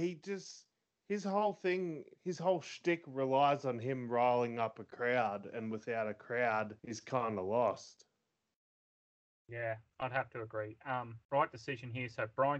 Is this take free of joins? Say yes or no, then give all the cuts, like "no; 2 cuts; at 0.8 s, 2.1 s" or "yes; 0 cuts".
no; 4 cuts; at 2.1 s, 6.8 s, 9.9 s, 11.2 s